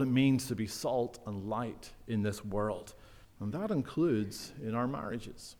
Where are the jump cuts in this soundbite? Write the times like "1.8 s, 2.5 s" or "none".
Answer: 3.2 s